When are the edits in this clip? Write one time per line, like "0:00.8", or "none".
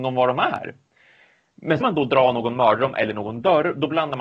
0:01.8